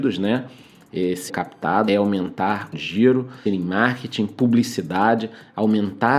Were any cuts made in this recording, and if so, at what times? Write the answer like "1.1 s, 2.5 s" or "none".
1.3 s, 1.9 s, 2.7 s, 3.5 s